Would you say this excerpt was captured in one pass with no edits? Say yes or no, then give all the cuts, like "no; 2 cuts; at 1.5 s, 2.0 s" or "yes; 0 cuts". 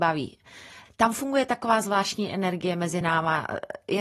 yes; 0 cuts